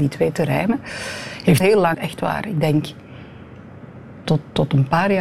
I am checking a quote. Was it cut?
yes; 3 cuts; at 1.6 s, 1.9 s, 4.2 s

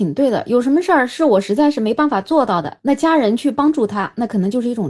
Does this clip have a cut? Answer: no; 0 cuts

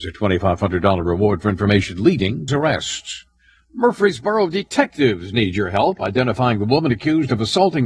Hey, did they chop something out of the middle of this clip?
yes; 1 cut; at 2.5 s

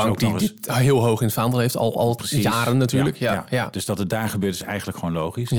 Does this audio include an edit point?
no; 0 cuts

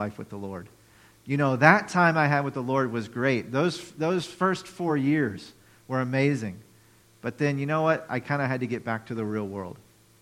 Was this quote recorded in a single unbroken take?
yes; 0 cuts

